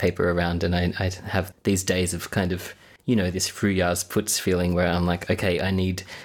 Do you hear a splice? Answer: yes; 2 cuts; at 1.5 s, 3.0 s

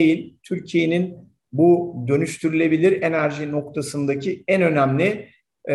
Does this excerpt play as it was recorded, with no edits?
yes; 0 cuts

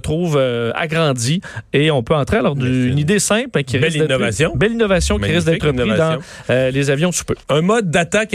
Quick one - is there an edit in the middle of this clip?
yes; 1 cut; at 7.4 s

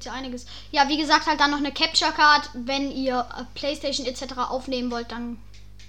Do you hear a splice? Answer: no; 0 cuts

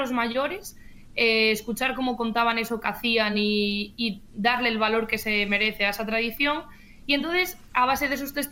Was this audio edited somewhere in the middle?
no; 0 cuts

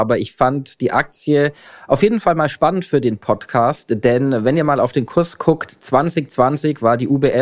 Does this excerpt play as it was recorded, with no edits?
yes; 0 cuts

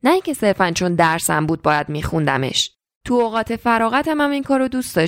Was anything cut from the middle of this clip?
no; 0 cuts

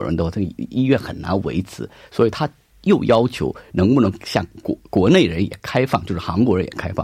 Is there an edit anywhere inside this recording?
no; 0 cuts

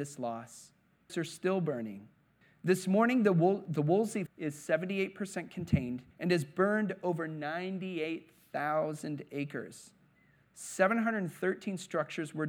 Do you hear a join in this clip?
yes; 4 cuts; at 1.1 s, 2.4 s, 4.3 s, 6.1 s

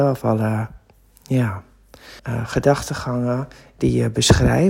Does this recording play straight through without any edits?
no; 1 cut; at 2.2 s

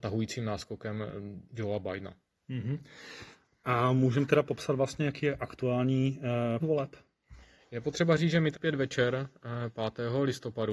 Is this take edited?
yes; 3 cuts; at 1.5 s, 6.6 s, 8.5 s

